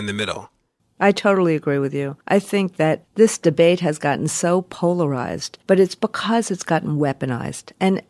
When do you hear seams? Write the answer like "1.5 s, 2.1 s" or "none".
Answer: 2.2 s, 5.6 s